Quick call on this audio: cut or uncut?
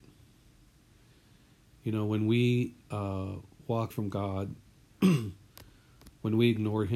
cut